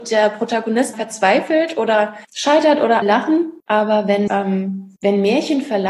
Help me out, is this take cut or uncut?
cut